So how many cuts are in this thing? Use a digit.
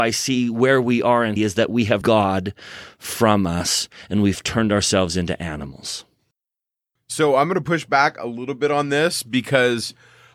2